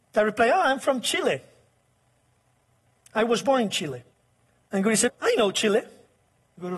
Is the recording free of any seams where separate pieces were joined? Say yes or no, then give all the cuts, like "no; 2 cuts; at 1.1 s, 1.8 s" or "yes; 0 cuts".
no; 1 cut; at 5.1 s